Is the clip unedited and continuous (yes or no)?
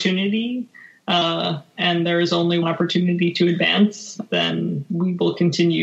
no